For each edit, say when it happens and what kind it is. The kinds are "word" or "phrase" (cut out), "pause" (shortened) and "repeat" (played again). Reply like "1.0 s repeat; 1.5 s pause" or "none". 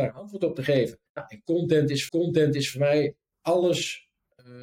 1.1 s pause; 2.1 s repeat